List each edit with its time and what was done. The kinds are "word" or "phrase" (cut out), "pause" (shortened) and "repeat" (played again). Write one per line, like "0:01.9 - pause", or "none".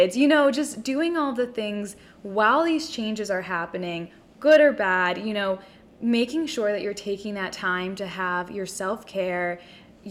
none